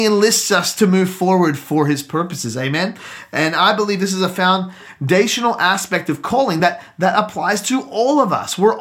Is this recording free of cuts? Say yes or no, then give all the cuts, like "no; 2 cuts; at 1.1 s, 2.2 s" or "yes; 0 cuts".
yes; 0 cuts